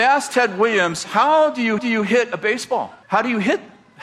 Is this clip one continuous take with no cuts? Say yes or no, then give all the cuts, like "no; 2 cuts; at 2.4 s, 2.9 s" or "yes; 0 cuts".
no; 2 cuts; at 1.8 s, 3.0 s